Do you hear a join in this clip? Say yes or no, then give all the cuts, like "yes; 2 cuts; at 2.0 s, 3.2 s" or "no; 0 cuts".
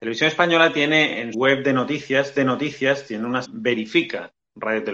yes; 3 cuts; at 1.3 s, 2.4 s, 3.4 s